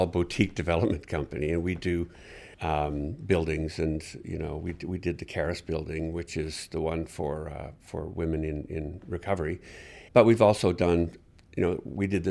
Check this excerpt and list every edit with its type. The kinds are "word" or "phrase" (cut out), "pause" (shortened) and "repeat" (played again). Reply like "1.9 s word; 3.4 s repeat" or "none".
2.5 s pause; 10.1 s pause